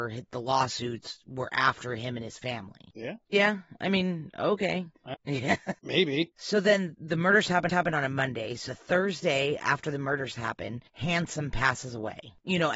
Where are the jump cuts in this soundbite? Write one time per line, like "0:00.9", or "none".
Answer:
0:05.1
0:06.9
0:07.7
0:08.7
0:10.9